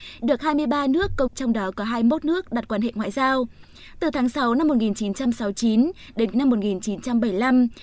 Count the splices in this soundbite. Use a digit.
2